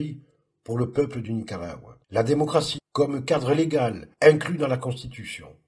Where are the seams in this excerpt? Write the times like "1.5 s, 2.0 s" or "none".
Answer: 2.0 s, 2.8 s, 4.1 s